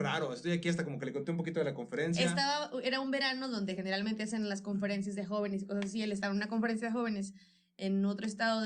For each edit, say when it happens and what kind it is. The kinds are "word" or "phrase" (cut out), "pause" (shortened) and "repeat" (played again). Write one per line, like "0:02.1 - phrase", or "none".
none

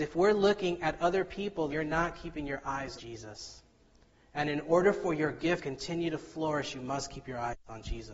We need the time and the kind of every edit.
0:01.7 - word
0:03.0 - word
0:05.6 - word

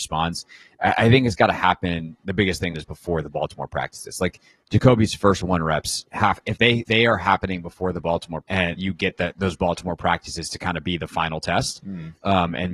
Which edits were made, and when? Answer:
0:02.7 - word
0:06.9 - word
0:08.4 - word
0:08.8 - word

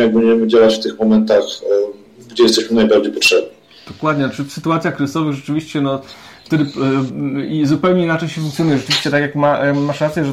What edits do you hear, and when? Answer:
none

